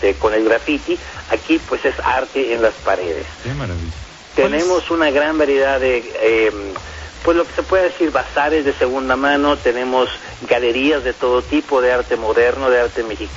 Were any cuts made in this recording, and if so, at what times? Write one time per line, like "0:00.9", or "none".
none